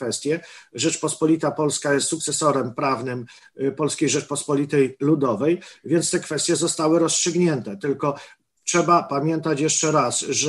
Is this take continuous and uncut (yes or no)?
yes